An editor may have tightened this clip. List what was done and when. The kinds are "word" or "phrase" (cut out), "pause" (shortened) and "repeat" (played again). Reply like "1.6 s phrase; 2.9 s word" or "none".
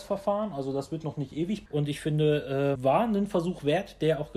1.7 s word; 2.8 s word